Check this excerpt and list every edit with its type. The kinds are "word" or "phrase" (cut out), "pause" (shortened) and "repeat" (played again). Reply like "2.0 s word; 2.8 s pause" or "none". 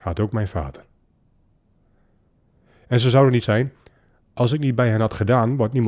3.4 s word